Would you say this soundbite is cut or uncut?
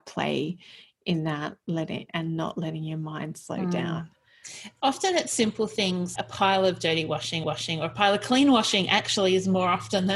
cut